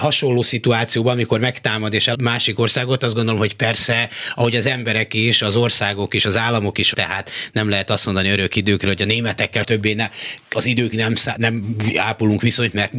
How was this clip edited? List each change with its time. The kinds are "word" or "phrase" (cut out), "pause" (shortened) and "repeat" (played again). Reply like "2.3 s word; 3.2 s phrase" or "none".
2.1 s phrase; 3.0 s word; 6.9 s word; 9.6 s word; 10.9 s word; 11.4 s word